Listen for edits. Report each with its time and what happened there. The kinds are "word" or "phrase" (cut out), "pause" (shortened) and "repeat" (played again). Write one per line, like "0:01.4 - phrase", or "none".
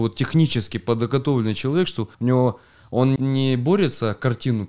0:02.1 - pause
0:03.2 - word